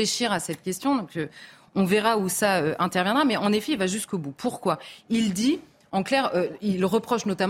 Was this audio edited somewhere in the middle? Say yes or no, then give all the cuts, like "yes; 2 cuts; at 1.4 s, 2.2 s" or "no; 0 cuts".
no; 0 cuts